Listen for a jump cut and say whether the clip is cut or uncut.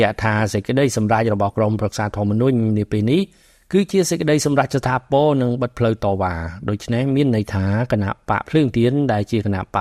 uncut